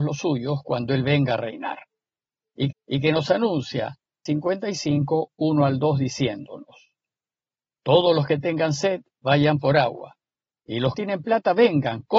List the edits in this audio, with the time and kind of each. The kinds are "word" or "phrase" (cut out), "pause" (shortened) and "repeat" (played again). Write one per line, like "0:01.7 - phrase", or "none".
0:02.7 - repeat
0:04.3 - word
0:10.9 - phrase